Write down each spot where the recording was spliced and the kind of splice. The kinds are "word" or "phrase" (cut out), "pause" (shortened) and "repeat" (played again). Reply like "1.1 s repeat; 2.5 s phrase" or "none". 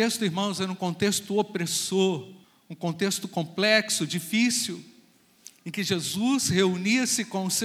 2.4 s pause